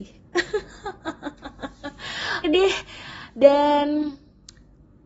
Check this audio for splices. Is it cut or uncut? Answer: cut